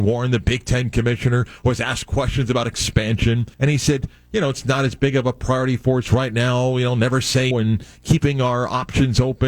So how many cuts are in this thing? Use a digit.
2